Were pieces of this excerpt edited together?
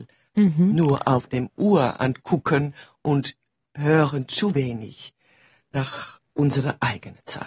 no; 0 cuts

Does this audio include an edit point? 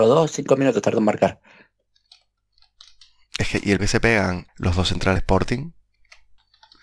yes; 3 cuts; at 3.8 s, 4.5 s, 5.2 s

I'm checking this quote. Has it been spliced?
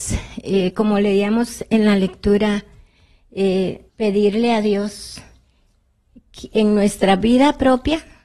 yes; 1 cut; at 3.9 s

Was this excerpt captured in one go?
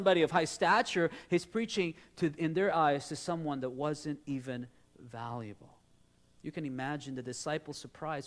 yes; 0 cuts

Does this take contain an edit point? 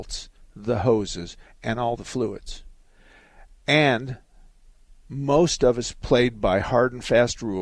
no; 0 cuts

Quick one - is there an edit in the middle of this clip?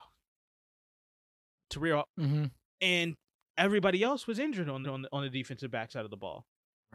yes; 3 cuts; at 1.7 s, 2.1 s, 4.8 s

